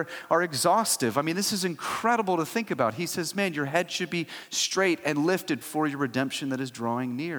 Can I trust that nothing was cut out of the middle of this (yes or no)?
no